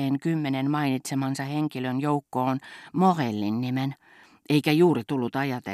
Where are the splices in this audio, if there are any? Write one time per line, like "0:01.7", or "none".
none